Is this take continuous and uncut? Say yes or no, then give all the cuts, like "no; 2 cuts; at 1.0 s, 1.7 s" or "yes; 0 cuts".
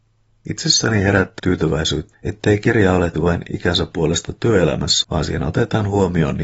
no; 4 cuts; at 1.4 s, 2.1 s, 3.1 s, 5.0 s